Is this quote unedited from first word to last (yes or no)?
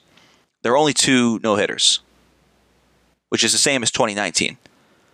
yes